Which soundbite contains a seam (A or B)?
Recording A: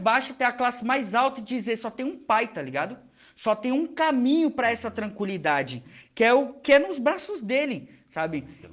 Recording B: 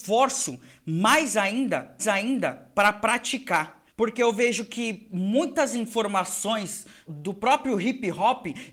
B